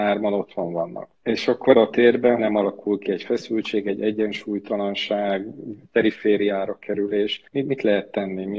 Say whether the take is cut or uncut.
cut